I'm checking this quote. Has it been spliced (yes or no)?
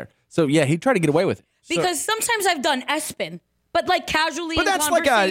no